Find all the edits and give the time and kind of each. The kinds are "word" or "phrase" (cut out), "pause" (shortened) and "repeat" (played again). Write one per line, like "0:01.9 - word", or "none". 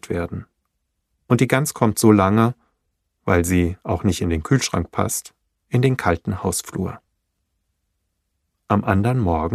none